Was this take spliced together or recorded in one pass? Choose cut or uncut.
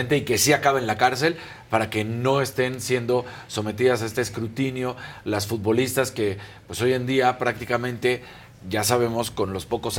uncut